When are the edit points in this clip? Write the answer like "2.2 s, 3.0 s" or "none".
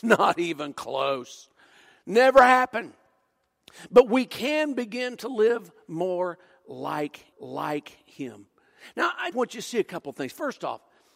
7.3 s, 9.3 s